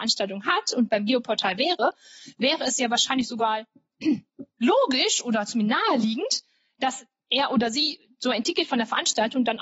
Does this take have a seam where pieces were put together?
no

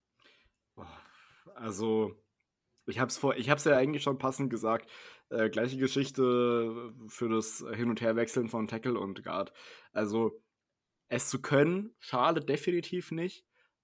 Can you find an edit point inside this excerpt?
no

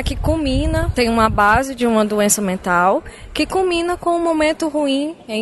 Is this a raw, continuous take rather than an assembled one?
no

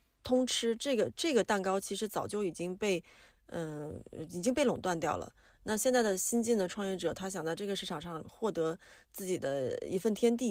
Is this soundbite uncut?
yes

